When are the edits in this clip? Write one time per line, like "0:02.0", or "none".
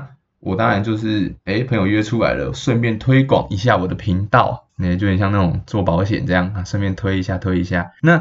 0:01.4
0:04.7